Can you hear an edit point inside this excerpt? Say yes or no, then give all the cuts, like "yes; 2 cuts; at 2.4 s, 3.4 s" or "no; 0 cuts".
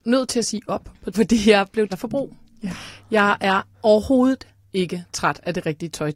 yes; 3 cuts; at 1.1 s, 1.9 s, 3.7 s